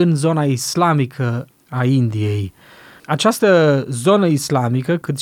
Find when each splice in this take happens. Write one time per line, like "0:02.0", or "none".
none